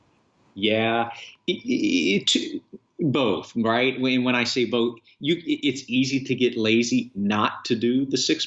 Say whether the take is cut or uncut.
uncut